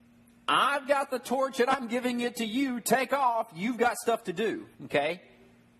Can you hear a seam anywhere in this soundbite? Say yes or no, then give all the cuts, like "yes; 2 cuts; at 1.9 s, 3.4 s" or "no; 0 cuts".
yes; 1 cut; at 4.7 s